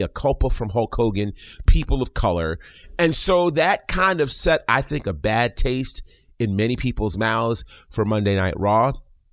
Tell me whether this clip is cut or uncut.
cut